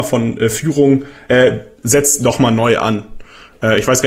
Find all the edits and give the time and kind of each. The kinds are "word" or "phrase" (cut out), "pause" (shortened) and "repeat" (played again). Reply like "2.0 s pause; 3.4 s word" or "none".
none